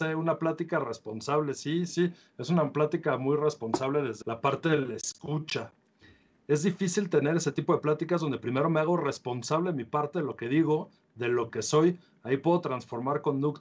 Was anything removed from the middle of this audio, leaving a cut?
yes; 2 cuts; at 1.9 s, 4.2 s

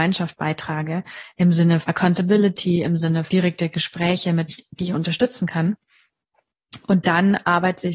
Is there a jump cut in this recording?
yes; 3 cuts; at 1.8 s, 3.3 s, 4.5 s

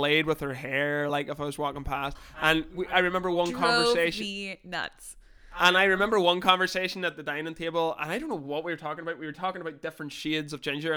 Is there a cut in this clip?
no; 0 cuts

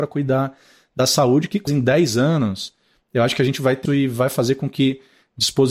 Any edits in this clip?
yes; 2 cuts; at 1.7 s, 3.8 s

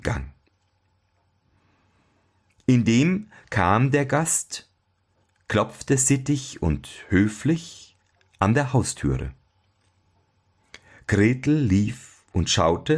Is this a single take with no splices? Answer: yes; 0 cuts

